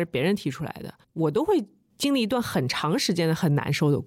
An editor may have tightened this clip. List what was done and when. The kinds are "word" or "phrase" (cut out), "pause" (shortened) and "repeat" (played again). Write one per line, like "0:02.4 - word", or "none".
0:01.0 - pause